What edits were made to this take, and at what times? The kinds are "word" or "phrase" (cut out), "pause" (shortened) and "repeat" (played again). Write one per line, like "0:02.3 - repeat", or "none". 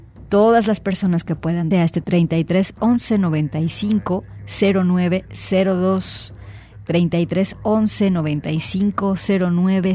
0:01.7 - phrase
0:02.0 - word